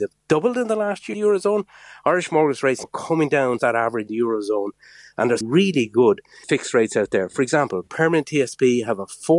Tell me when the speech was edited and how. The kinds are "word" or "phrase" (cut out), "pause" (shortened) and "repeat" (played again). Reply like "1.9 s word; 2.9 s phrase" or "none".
1.1 s word; 2.8 s word; 3.6 s word; 4.1 s word; 5.4 s phrase; 6.4 s word